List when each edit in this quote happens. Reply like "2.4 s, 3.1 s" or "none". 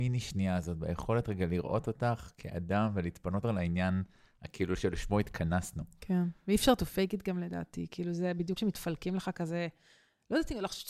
3.4 s, 8.6 s